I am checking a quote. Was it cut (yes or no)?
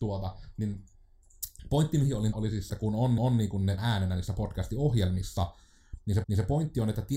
yes